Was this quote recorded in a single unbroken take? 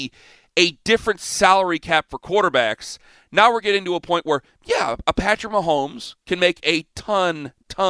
yes; 0 cuts

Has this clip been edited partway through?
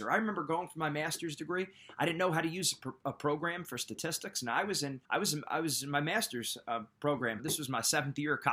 yes; 2 cuts; at 5.0 s, 7.4 s

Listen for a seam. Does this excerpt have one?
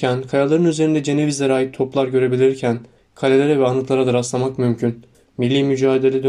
no; 0 cuts

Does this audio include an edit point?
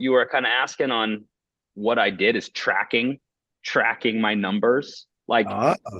no; 0 cuts

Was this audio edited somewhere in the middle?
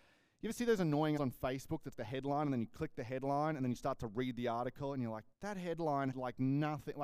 yes; 4 cuts; at 1.2 s, 1.9 s, 5.3 s, 6.1 s

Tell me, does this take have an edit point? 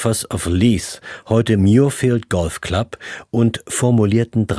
no; 0 cuts

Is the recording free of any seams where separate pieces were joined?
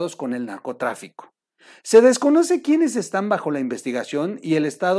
yes; 0 cuts

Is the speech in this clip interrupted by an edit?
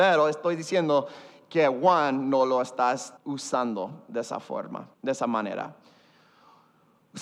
yes; 2 cuts; at 3.2 s, 4.9 s

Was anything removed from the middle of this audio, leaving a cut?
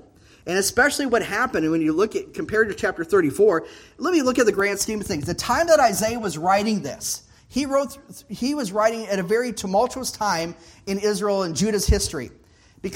no; 0 cuts

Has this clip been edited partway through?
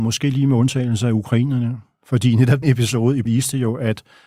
yes; 2 cuts; at 2.6 s, 3.3 s

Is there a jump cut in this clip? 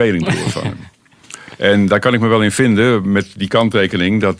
no; 0 cuts

